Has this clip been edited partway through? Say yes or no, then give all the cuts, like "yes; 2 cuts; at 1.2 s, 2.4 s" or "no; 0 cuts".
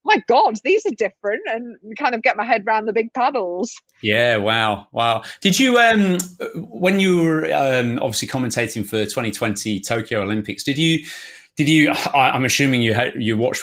yes; 1 cut; at 3.9 s